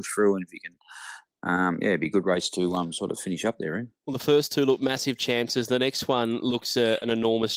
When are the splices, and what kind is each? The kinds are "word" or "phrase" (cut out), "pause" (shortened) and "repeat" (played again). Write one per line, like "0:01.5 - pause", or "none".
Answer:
none